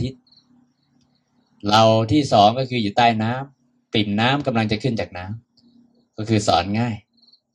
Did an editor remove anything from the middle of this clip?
yes; 1 cut; at 5.4 s

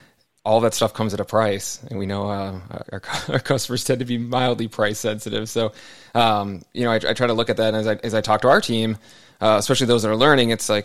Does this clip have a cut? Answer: yes; 1 cut; at 2.8 s

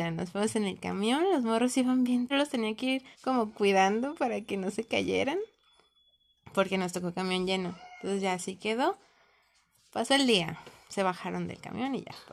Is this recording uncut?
no; 2 cuts; at 2.3 s, 3.1 s

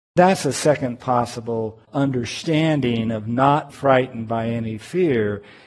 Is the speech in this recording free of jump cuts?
no; 2 cuts; at 1.8 s, 3.7 s

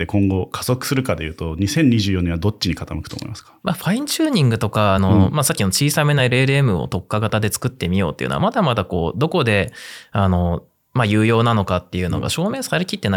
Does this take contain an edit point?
no; 0 cuts

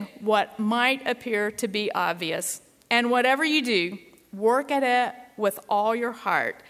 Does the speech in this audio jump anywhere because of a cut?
no; 0 cuts

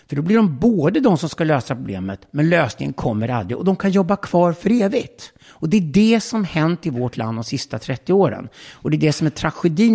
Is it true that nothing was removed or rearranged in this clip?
no; 1 cut; at 5.4 s

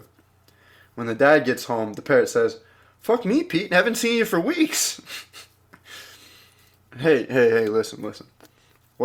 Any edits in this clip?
no; 0 cuts

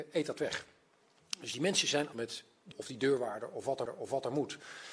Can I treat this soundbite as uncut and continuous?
no; 3 cuts; at 2.1 s, 2.7 s, 3.9 s

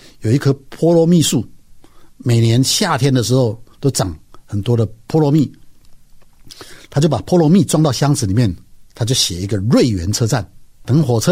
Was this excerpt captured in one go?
no; 1 cut; at 8.9 s

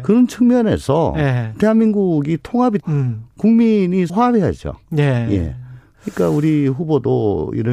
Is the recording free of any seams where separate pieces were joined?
no; 2 cuts; at 2.8 s, 4.1 s

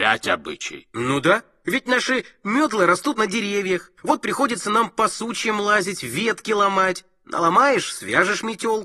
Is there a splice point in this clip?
yes; 1 cut; at 4.0 s

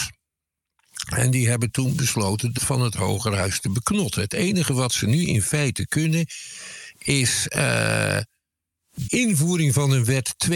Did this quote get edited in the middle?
yes; 2 cuts; at 2.6 s, 9.1 s

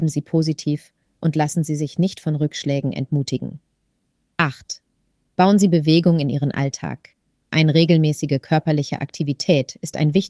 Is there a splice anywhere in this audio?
no; 0 cuts

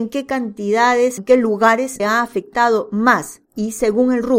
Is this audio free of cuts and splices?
no; 3 cuts; at 1.2 s, 2.0 s, 3.4 s

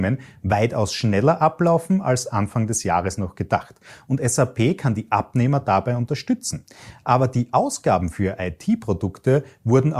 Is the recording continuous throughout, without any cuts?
yes; 0 cuts

